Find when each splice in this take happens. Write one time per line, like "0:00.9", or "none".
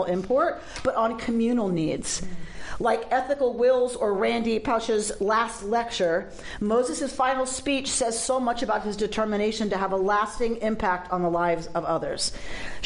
none